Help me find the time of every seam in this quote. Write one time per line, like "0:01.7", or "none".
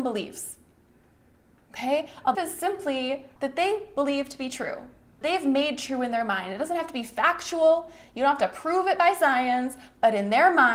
0:02.3
0:03.4
0:05.2